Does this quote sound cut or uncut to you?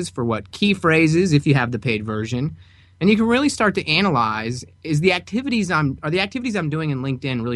uncut